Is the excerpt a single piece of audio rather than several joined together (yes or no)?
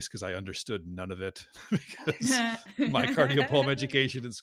yes